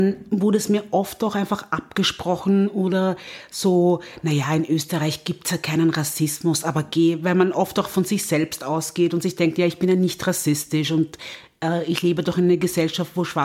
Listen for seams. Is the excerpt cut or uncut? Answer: uncut